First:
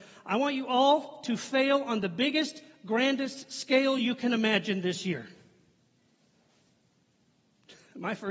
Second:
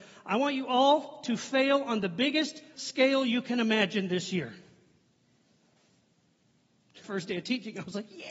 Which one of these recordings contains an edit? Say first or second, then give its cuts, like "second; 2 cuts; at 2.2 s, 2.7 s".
second; 2 cuts; at 2.7 s, 7.0 s